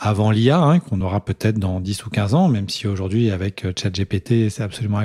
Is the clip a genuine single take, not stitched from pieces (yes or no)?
yes